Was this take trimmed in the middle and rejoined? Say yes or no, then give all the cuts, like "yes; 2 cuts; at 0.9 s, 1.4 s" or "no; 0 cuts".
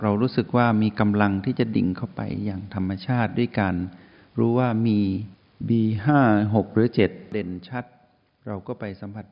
no; 0 cuts